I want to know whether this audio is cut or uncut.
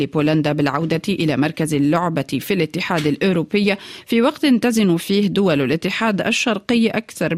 uncut